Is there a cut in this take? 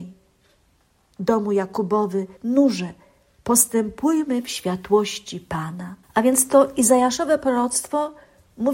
yes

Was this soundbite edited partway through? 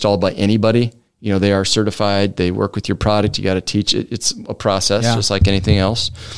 no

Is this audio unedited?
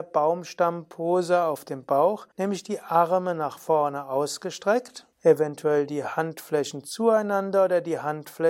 no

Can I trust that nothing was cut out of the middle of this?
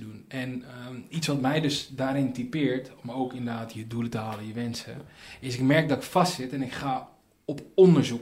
yes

